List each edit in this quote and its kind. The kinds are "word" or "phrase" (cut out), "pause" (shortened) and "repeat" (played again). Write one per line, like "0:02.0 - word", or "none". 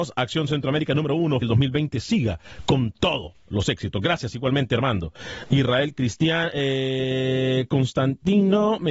0:01.4 - phrase

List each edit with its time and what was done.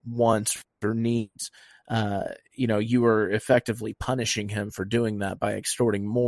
none

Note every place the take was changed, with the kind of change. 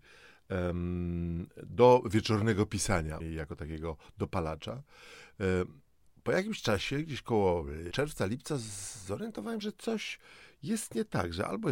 0:03.2 - word
0:07.9 - word
0:09.6 - word

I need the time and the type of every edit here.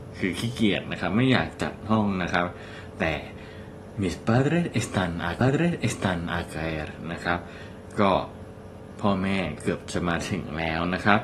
0:05.4 - repeat

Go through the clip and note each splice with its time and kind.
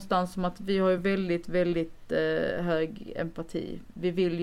none

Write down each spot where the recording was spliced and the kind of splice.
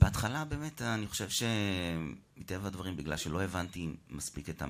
none

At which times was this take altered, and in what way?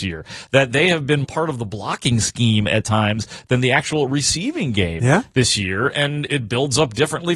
0:01.2 - word
0:06.3 - word

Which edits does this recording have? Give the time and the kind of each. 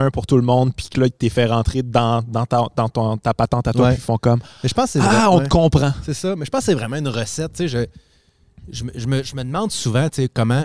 none

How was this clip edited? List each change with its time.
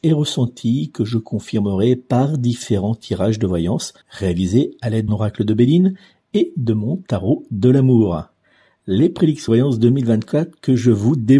0:04.0 - pause
0:05.1 - word
0:09.5 - word

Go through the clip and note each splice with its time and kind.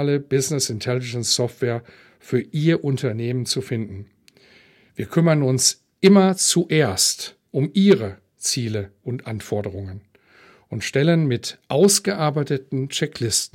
none

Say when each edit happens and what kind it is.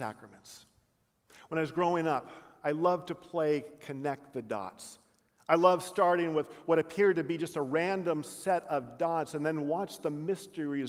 none

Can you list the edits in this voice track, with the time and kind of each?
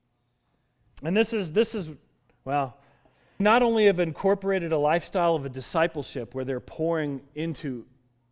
0:03.4 - word

